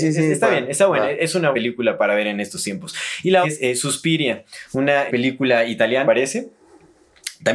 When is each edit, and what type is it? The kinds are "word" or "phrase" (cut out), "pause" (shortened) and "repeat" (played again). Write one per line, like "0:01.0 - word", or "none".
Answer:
0:01.5 - word
0:03.4 - word
0:05.1 - word
0:06.0 - word